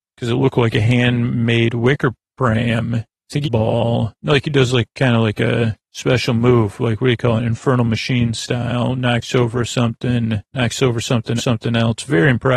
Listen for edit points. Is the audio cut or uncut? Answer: cut